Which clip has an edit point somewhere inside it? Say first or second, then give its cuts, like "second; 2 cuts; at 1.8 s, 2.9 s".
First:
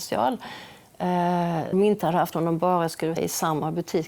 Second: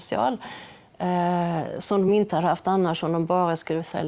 first; 3 cuts; at 1.7 s, 2.3 s, 3.2 s